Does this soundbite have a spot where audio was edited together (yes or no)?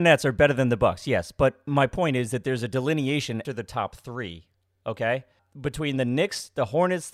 yes